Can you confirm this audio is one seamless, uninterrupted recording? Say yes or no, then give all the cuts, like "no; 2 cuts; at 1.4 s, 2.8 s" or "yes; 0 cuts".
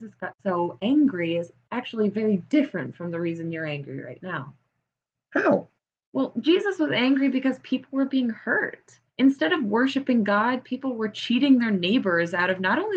no; 2 cuts; at 5.8 s, 9.1 s